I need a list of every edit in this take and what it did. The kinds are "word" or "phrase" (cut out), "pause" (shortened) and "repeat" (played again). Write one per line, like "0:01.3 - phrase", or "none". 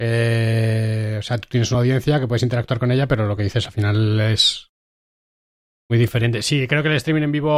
none